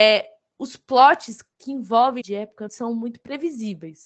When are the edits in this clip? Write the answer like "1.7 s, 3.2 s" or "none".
2.2 s, 2.7 s